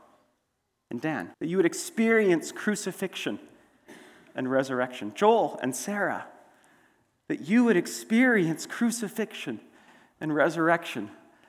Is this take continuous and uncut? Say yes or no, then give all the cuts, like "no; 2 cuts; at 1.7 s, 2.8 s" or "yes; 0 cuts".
no; 1 cut; at 1.3 s